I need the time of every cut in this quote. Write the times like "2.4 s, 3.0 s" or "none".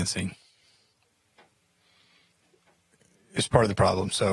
none